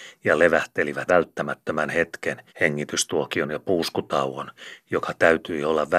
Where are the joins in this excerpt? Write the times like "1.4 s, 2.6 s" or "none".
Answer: 1.1 s, 2.5 s

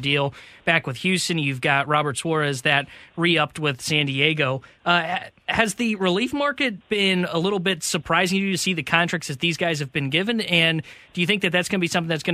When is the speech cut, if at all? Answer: 6.8 s

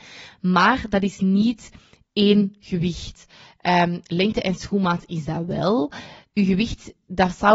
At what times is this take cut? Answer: none

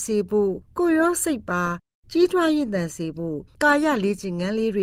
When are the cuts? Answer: none

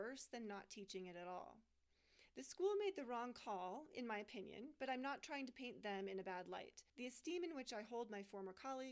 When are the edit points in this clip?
6.9 s

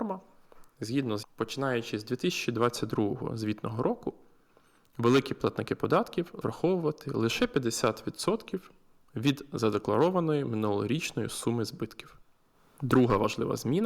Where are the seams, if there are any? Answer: 1.2 s, 6.4 s

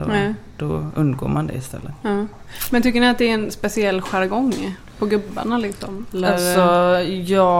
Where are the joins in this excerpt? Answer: none

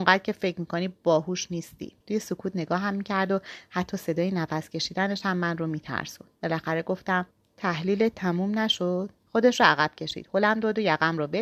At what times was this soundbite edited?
2.0 s, 6.4 s, 7.3 s, 9.2 s

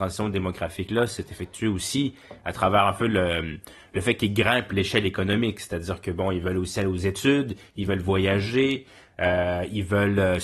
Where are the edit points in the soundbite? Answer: none

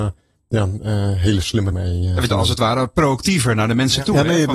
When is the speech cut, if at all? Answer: 1.7 s, 2.3 s

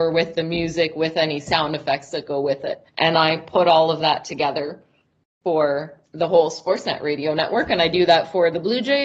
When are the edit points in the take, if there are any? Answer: 2.9 s, 6.1 s

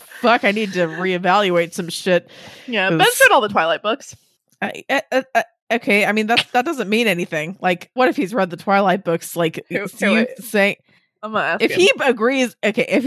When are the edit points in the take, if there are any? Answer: 8.0 s

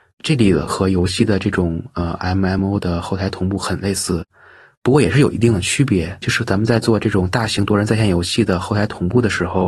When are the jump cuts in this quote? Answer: none

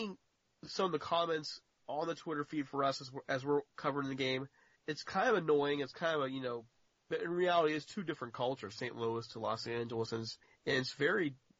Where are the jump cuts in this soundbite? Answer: none

